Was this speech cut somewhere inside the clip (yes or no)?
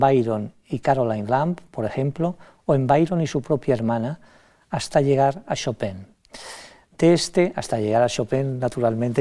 no